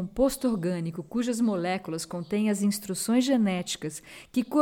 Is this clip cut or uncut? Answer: uncut